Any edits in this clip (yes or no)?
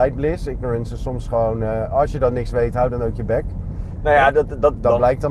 no